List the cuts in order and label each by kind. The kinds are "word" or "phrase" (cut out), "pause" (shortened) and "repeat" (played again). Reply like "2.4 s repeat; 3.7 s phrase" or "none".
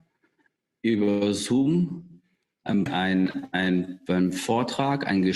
2.9 s phrase